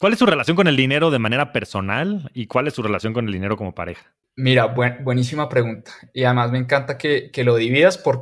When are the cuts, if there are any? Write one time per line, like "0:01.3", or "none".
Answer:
0:04.2